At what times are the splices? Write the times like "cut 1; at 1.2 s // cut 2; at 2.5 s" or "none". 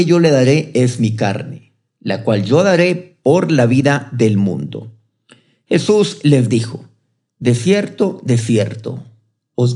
none